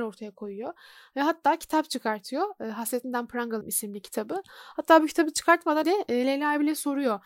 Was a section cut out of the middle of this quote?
yes; 2 cuts; at 3.6 s, 5.8 s

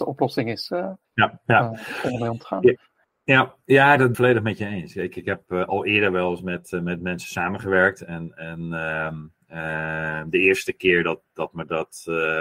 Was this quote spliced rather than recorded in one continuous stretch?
yes; 2 cuts; at 1.0 s, 4.1 s

